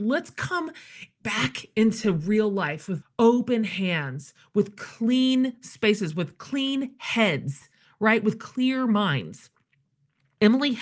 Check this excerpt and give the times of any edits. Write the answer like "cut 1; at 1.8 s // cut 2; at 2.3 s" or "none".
cut 1; at 3.0 s